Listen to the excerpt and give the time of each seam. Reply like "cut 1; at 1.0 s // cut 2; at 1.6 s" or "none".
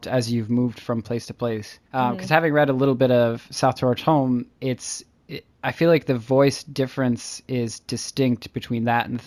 cut 1; at 1.8 s // cut 2; at 4.5 s